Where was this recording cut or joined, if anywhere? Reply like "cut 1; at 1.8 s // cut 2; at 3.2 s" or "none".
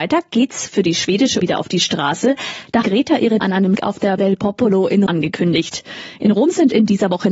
cut 1; at 1.4 s // cut 2; at 2.8 s // cut 3; at 3.4 s // cut 4; at 3.7 s // cut 5; at 4.2 s // cut 6; at 5.1 s